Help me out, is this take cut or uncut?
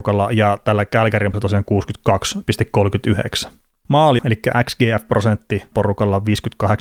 cut